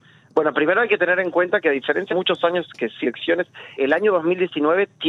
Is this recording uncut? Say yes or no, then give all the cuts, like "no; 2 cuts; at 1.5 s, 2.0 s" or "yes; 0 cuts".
no; 3 cuts; at 2.1 s, 3.0 s, 3.8 s